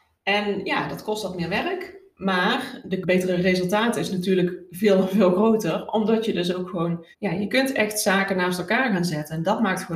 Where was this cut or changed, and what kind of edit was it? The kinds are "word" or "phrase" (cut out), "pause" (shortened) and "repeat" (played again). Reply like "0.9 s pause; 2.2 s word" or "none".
3.0 s phrase; 7.1 s pause